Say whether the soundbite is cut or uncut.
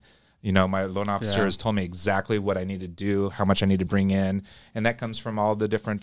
uncut